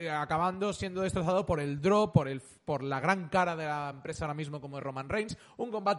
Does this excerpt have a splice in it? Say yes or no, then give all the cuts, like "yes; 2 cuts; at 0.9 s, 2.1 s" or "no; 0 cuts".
no; 0 cuts